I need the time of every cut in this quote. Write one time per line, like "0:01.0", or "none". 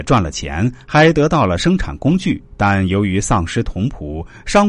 0:02.5

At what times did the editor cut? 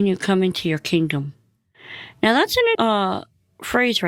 0:02.7

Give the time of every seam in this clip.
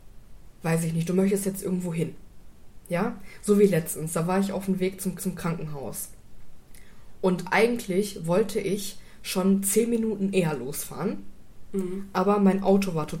0:05.2

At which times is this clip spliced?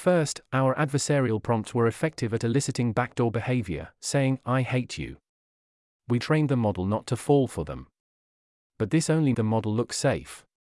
0:06.2
0:09.3

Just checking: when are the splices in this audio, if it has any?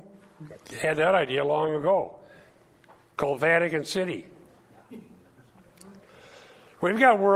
none

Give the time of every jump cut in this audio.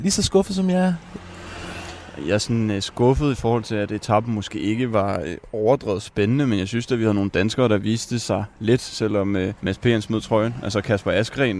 0:09.6

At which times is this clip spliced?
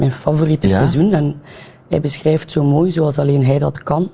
none

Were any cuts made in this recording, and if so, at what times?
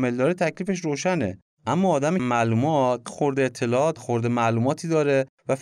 0:02.2
0:03.1
0:04.0

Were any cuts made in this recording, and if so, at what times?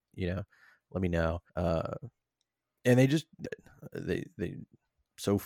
0:01.5
0:03.4

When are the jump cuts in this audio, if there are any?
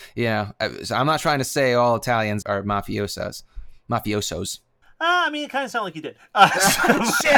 0:02.4
0:04.8

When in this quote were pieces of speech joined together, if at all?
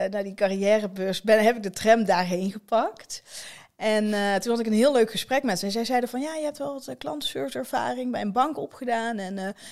none

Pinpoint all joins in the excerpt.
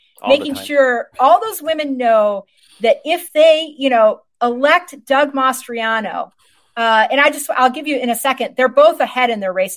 none

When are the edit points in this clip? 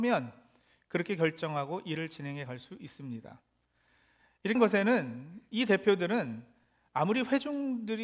0:04.5

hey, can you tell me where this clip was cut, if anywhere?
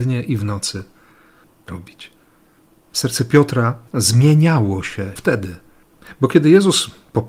0:01.7
0:02.9
0:03.9
0:05.2

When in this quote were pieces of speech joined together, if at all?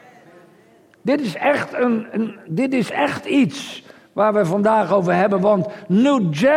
none

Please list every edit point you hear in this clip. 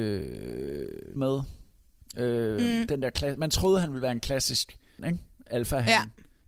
0:01.2
0:03.4
0:05.0

